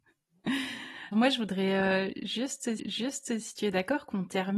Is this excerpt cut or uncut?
cut